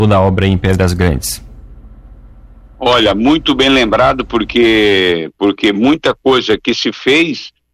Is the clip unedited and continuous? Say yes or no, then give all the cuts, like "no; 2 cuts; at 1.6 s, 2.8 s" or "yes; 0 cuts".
yes; 0 cuts